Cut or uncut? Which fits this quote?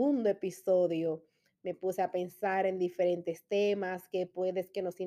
uncut